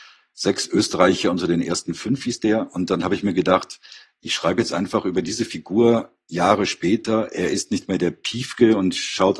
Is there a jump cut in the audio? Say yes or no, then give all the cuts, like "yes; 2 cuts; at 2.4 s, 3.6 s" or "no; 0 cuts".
no; 0 cuts